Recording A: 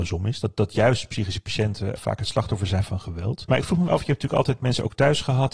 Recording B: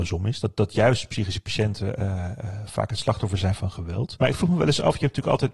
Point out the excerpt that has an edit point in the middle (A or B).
A